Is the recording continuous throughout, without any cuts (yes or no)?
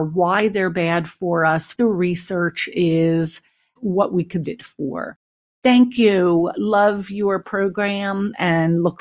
no